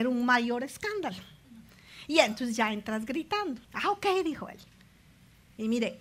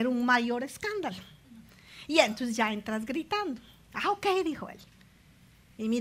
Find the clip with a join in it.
first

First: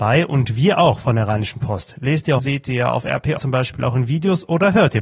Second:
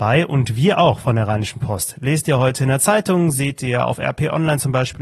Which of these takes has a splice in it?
first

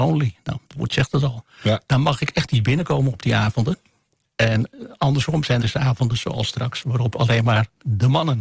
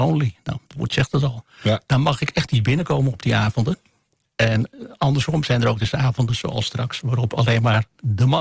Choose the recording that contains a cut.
first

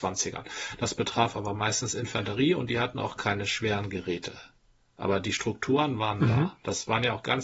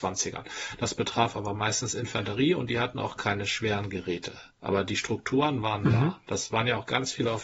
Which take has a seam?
second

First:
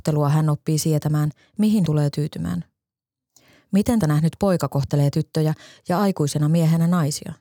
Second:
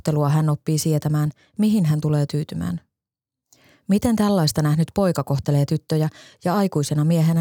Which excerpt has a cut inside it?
first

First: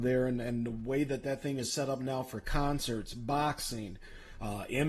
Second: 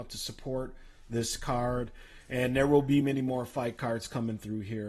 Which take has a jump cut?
second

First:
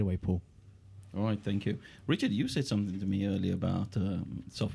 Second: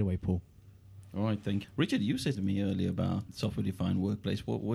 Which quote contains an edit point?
second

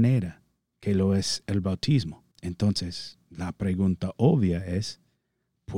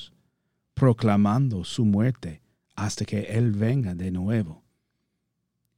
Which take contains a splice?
first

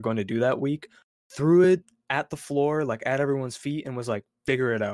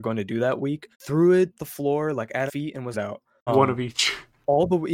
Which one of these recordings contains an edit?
second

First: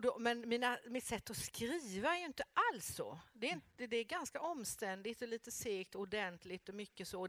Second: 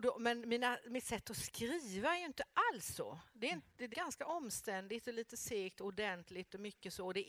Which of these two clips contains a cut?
second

